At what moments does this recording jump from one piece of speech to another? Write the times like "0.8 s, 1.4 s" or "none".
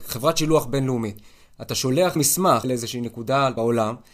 none